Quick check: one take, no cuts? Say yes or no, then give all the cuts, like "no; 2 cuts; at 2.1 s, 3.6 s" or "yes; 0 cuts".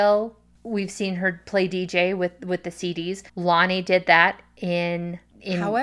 no; 1 cut; at 3.3 s